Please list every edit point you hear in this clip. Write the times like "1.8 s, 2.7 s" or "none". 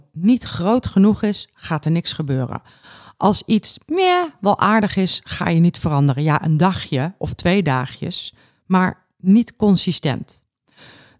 none